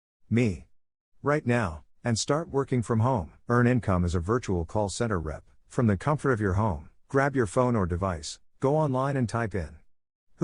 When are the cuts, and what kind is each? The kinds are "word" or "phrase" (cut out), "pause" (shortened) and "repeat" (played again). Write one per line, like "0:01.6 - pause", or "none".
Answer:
0:01.9 - pause
0:03.4 - pause
0:05.6 - pause
0:07.0 - pause
0:08.5 - pause